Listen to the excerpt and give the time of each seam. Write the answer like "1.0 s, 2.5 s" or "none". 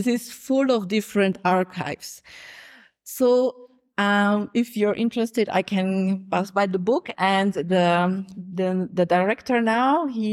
none